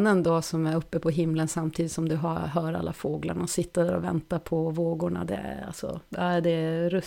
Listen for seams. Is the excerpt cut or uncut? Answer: uncut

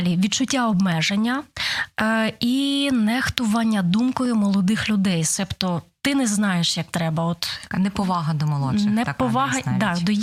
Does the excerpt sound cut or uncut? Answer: uncut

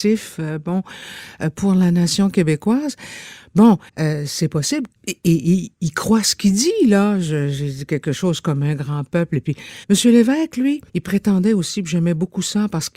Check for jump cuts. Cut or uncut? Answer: cut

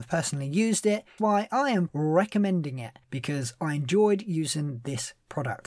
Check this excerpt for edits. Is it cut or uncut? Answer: cut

